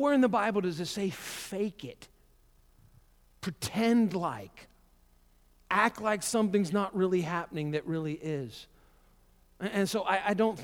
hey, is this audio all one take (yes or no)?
yes